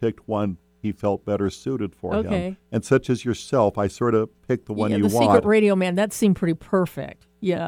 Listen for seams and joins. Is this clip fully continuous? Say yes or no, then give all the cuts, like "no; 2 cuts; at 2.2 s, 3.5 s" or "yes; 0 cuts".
yes; 0 cuts